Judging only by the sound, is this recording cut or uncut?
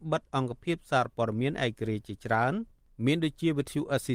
uncut